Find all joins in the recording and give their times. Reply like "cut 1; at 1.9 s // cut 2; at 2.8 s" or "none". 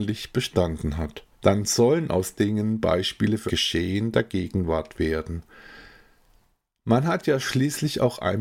cut 1; at 1.3 s // cut 2; at 2.4 s // cut 3; at 3.5 s